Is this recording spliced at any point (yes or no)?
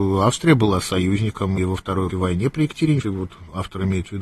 yes